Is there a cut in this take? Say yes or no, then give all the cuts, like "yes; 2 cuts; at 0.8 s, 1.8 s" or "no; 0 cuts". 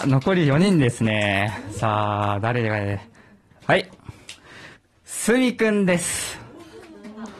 no; 0 cuts